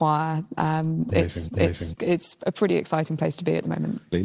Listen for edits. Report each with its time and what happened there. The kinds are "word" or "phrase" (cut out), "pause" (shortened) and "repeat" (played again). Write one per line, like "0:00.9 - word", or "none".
0:01.5 - repeat